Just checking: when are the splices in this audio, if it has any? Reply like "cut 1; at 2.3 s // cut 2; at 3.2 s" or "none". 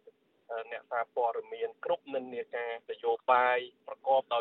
cut 1; at 2.8 s